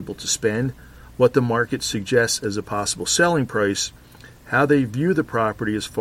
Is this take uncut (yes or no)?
yes